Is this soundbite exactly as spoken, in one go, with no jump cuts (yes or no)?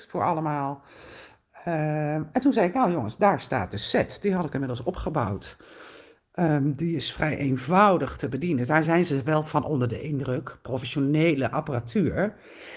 yes